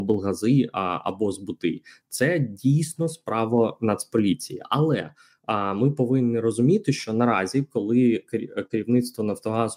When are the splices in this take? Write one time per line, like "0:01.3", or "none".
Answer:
none